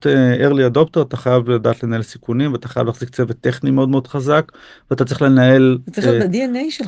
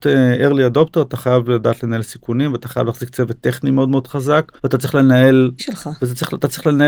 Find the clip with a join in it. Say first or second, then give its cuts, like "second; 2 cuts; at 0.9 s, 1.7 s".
second; 2 cuts; at 4.6 s, 5.6 s